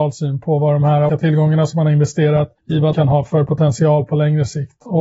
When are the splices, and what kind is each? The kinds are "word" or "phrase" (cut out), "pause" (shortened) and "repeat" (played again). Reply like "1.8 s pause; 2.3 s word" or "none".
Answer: 1.1 s word; 2.6 s pause; 2.9 s word